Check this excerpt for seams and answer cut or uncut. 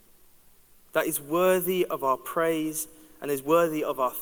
uncut